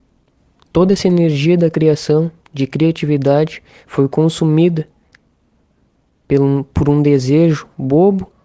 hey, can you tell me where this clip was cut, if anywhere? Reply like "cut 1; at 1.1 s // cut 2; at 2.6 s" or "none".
none